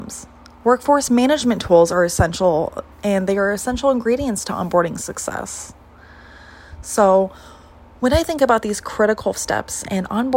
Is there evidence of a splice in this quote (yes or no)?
yes